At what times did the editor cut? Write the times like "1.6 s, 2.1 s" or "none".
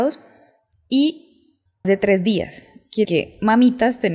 1.8 s, 3.0 s